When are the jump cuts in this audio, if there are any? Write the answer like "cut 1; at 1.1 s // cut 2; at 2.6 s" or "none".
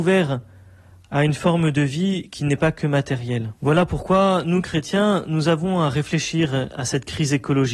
cut 1; at 3.6 s